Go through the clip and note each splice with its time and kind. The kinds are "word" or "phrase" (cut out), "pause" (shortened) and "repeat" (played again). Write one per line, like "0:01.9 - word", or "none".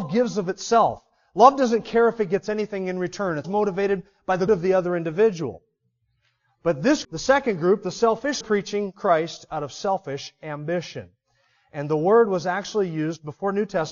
0:03.4 - word
0:04.5 - word
0:07.0 - word
0:08.4 - phrase